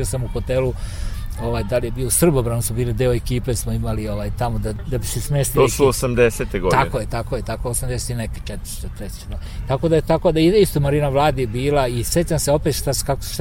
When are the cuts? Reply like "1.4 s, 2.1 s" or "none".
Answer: none